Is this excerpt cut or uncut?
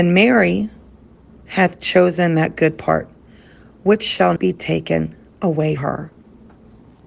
cut